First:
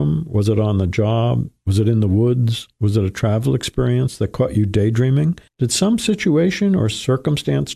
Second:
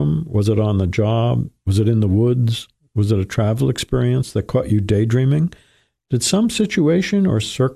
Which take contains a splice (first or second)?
first